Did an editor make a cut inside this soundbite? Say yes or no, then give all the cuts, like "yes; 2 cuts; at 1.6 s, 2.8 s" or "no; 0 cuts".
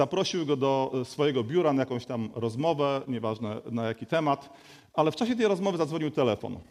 no; 0 cuts